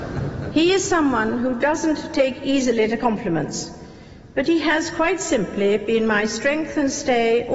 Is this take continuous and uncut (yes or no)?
yes